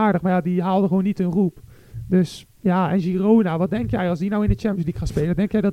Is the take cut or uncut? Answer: cut